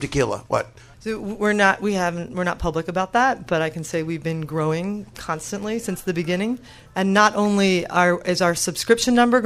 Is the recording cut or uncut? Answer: uncut